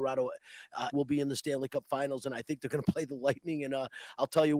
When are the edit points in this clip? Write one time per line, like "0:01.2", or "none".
0:00.9